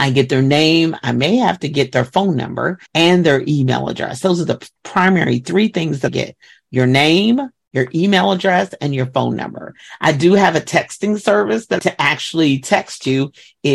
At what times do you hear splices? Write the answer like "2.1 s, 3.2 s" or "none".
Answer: 2.9 s, 6.1 s, 11.8 s